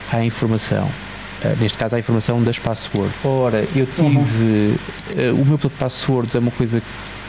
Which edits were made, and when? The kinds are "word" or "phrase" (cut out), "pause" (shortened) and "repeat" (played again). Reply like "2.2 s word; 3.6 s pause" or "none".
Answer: 5.6 s word